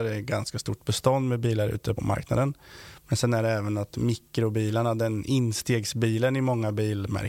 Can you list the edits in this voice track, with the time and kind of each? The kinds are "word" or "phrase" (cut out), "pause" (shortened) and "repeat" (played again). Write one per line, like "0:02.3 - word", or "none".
0:02.0 - word